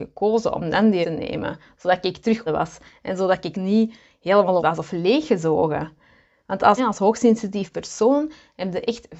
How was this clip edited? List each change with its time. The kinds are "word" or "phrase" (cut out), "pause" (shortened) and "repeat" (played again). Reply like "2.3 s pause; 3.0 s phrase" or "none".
1.0 s word; 2.5 s word; 3.5 s word; 4.6 s word; 6.8 s word